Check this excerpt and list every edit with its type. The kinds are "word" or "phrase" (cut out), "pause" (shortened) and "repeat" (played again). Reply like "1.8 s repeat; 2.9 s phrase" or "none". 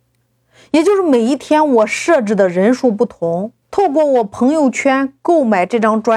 3.6 s pause